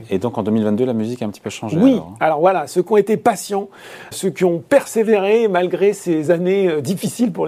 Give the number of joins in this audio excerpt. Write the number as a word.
one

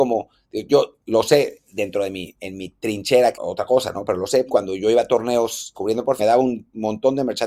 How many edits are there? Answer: five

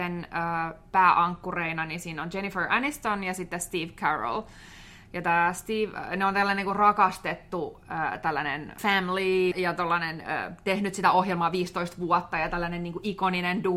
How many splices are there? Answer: two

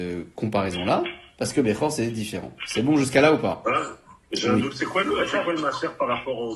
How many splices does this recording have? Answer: zero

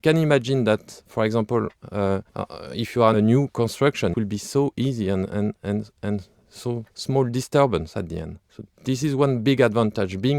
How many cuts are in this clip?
five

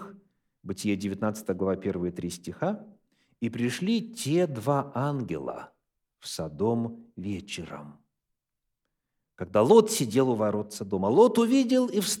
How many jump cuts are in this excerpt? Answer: zero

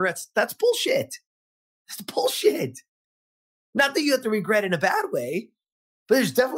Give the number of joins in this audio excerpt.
zero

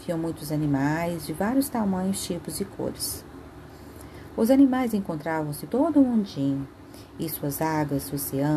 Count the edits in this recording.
one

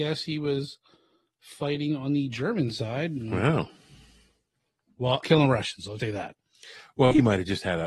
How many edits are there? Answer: two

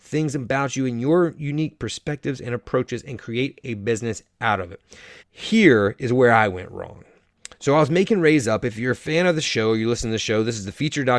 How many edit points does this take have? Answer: one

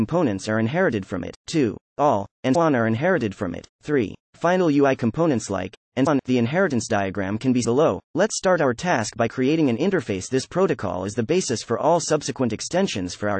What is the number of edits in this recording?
six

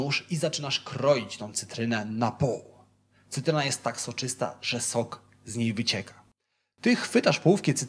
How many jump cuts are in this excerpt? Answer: zero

